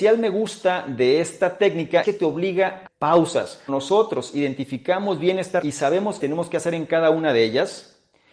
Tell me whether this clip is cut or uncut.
cut